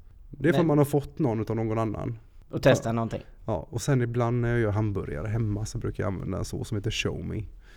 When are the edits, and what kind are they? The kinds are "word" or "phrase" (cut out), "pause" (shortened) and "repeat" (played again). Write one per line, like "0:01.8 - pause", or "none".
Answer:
none